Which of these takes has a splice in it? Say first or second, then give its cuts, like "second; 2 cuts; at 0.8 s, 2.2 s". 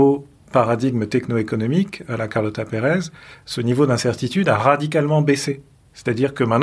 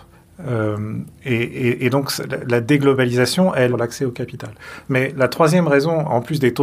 second; 1 cut; at 3.7 s